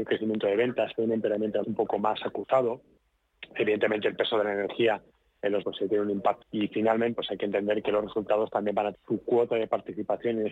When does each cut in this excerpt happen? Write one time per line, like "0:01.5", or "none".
0:01.6
0:05.6
0:06.4
0:07.1
0:07.8
0:08.9